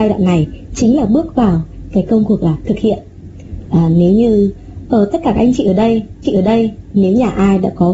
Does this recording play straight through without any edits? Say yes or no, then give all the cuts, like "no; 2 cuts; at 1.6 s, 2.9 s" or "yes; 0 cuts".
no; 1 cut; at 6.2 s